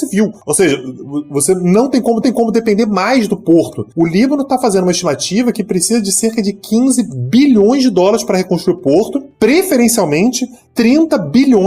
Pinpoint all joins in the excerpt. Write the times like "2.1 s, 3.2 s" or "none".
2.2 s

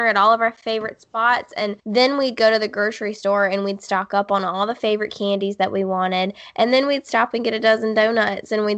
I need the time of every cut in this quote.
1.8 s

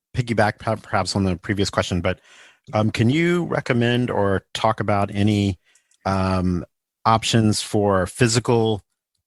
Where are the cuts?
none

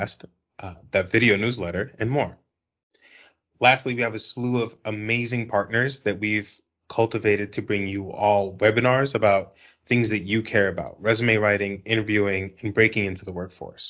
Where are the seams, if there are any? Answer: none

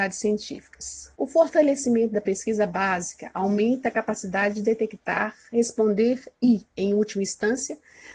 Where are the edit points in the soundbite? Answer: 1.1 s

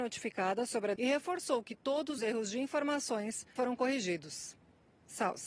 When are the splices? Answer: 1.0 s, 2.2 s, 3.6 s

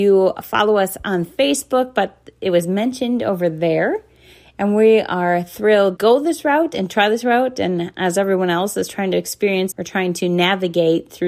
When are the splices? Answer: 6.0 s, 9.7 s

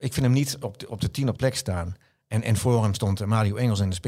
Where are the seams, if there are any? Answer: 1.4 s, 2.1 s

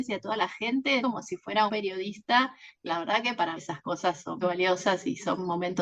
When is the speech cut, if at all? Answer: 1.0 s, 1.7 s, 2.9 s, 3.6 s, 4.4 s

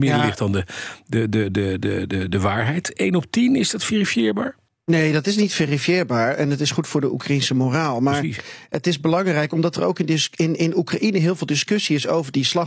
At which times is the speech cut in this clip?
4.7 s

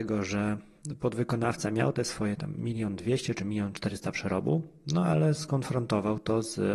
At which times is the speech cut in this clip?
none

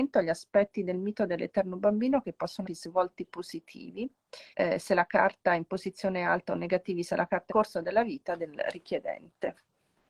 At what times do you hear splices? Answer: 2.6 s, 4.5 s, 7.5 s

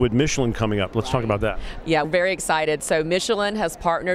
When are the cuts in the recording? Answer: 2.0 s

